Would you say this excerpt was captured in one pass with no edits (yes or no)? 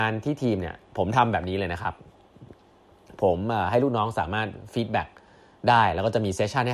yes